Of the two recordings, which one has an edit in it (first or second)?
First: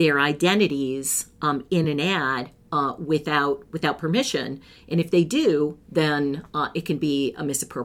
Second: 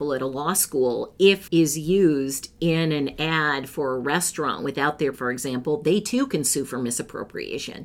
second